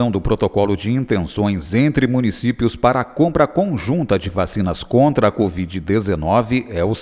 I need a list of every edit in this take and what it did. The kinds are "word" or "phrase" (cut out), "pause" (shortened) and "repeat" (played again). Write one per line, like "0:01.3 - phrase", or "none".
none